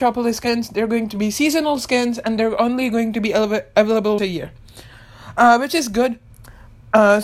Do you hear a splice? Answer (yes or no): yes